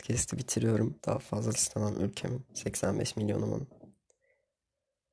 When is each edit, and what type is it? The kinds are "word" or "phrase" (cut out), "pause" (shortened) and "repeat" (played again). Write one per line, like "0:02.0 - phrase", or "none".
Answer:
0:01.0 - pause
0:01.5 - phrase
0:02.5 - pause